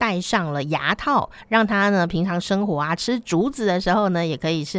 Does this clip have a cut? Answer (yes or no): no